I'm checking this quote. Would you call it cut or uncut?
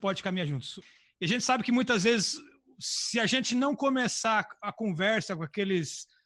uncut